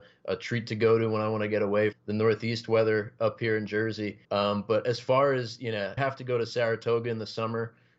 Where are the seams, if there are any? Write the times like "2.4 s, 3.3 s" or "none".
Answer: 1.9 s, 4.2 s, 6.0 s